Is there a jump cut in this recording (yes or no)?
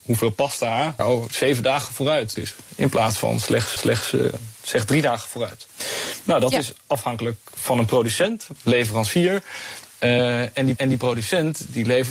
yes